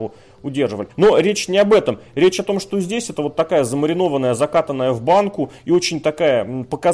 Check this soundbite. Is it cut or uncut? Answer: cut